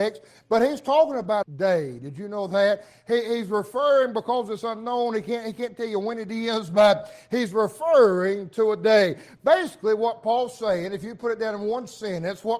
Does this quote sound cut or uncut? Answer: cut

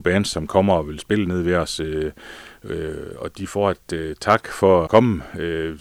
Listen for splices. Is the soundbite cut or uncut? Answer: cut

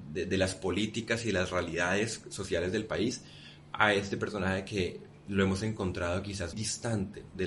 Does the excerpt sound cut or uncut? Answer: cut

